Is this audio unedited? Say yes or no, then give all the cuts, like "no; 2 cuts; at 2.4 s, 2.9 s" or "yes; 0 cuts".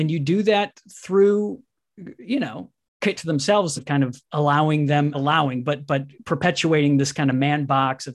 no; 4 cuts; at 3.1 s, 3.8 s, 4.2 s, 5.1 s